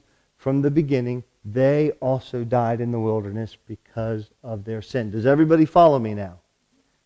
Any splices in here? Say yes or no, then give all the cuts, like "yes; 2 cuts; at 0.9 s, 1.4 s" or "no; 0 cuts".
no; 0 cuts